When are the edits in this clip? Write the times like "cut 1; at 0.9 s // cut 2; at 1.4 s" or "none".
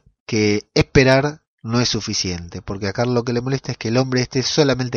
none